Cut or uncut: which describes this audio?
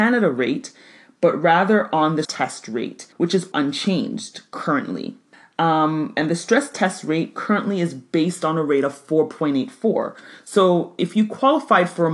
cut